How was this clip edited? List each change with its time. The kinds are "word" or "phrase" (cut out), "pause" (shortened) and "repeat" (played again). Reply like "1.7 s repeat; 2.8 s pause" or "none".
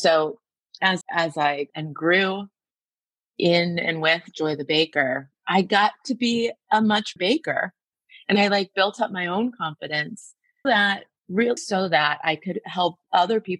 1.0 s word; 1.7 s word; 7.2 s word; 10.6 s word; 11.2 s word; 11.6 s word